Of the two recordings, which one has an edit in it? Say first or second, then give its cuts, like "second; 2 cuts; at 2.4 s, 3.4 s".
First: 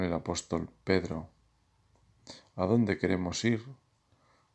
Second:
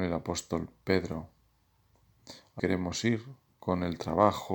second; 2 cuts; at 2.6 s, 3.5 s